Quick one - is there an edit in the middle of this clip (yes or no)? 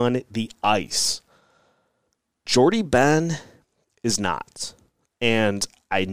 no